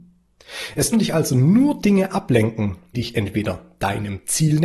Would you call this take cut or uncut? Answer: cut